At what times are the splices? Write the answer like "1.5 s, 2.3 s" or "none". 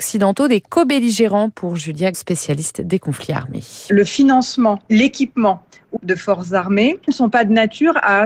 2.1 s, 6.0 s, 7.0 s